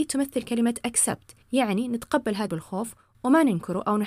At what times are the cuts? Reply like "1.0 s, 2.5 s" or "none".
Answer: 1.4 s, 2.5 s